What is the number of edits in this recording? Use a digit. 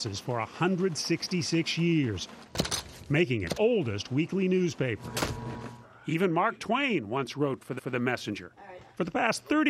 2